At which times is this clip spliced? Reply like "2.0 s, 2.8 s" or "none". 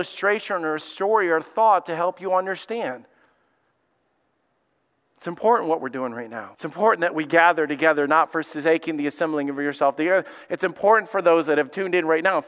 6.5 s

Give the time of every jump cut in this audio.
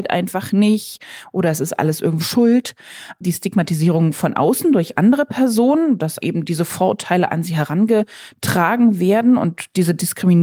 2.2 s, 6.2 s

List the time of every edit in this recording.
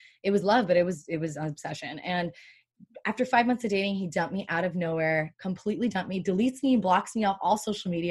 none

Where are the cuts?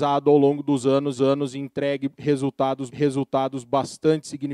1.2 s, 2.9 s

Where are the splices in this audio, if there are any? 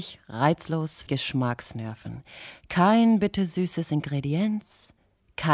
1.1 s

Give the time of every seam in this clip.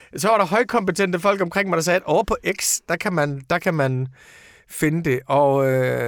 none

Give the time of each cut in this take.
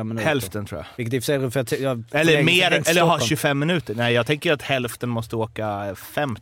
0.9 s

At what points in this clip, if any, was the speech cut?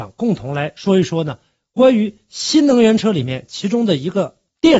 none

